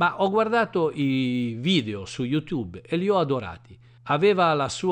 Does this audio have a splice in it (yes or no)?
no